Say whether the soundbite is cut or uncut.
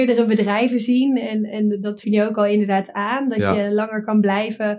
cut